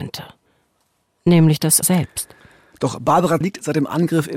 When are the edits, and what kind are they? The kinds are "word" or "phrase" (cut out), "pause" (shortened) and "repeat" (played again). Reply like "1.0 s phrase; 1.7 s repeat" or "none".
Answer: 1.8 s word; 3.4 s word